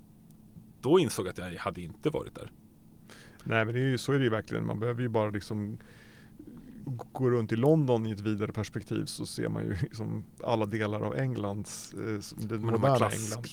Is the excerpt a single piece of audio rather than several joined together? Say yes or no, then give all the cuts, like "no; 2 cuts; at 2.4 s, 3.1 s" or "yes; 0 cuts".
no; 1 cut; at 6.8 s